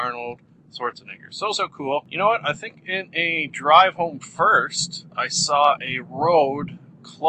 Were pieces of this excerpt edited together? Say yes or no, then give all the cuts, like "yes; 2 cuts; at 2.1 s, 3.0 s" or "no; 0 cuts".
no; 0 cuts